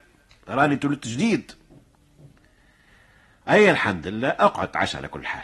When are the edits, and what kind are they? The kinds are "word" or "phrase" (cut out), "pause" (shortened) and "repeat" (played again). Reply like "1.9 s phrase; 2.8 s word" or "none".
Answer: none